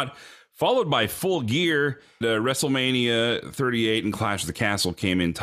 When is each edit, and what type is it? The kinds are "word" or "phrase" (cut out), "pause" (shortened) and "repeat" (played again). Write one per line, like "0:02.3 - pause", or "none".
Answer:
0:02.2 - word